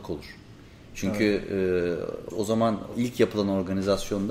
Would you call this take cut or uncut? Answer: cut